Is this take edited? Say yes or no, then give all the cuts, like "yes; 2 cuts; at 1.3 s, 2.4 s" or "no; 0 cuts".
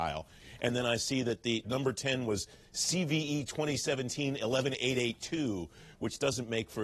yes; 1 cut; at 1.6 s